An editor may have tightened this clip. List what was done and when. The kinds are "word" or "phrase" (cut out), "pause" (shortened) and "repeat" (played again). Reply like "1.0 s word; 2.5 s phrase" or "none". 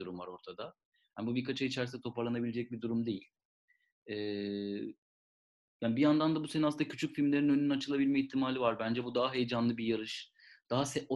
none